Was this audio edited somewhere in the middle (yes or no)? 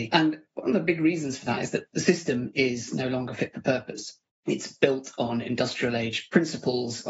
yes